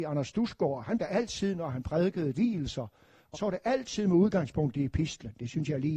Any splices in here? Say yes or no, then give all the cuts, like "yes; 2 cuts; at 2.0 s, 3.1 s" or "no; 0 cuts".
yes; 3 cuts; at 1.0 s, 2.3 s, 3.3 s